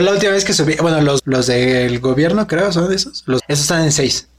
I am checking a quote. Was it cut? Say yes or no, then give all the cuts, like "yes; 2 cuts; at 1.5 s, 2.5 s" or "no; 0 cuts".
yes; 2 cuts; at 1.2 s, 3.4 s